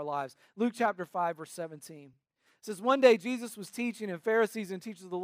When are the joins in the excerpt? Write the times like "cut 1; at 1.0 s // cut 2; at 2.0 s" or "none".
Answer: none